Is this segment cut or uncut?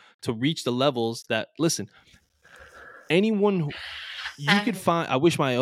uncut